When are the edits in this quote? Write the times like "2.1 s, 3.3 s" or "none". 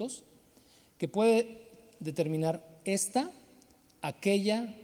none

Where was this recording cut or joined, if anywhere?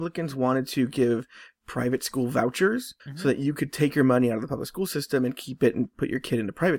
3.0 s

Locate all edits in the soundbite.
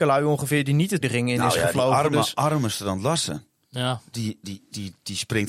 1.0 s

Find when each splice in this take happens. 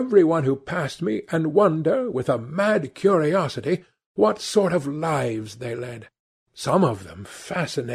none

